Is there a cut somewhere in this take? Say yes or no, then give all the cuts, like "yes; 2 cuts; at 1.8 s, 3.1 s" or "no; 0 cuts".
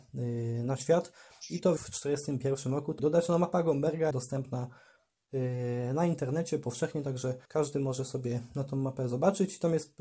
yes; 4 cuts; at 1.8 s, 3.0 s, 4.1 s, 7.5 s